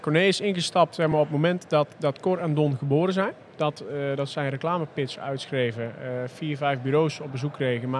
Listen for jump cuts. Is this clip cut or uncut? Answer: uncut